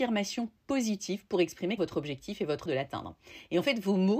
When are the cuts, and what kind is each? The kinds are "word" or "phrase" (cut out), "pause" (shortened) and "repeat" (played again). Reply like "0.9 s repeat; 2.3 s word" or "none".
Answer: 1.8 s word; 2.7 s word

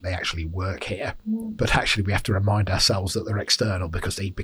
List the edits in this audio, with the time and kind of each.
none

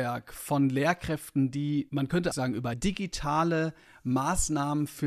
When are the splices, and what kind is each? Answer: 1.9 s phrase; 2.3 s word; 2.7 s phrase

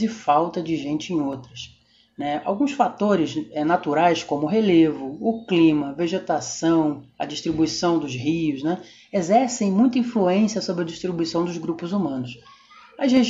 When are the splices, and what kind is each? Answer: none

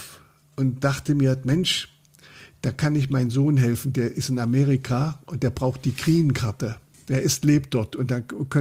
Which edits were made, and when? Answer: 6.9 s pause

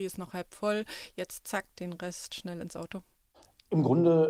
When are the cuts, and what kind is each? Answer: none

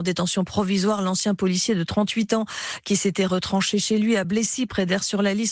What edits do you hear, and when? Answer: none

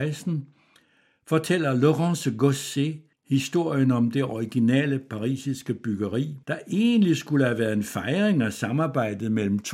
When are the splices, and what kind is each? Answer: 3.1 s pause; 6.4 s pause

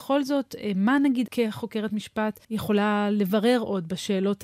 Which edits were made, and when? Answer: 1.3 s word; 2.4 s pause

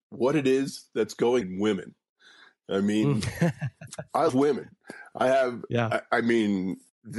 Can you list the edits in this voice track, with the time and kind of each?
1.4 s word; 4.3 s word

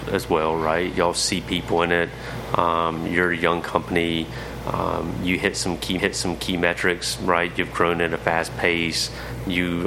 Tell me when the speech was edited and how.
6.0 s repeat

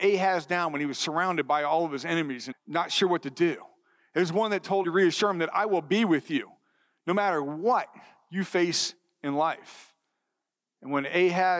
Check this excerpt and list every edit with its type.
2.5 s word; 4.8 s phrase

